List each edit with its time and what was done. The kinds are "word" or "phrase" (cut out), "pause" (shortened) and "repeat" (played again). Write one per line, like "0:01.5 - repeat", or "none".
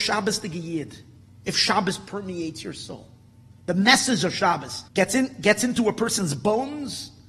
0:04.9 - pause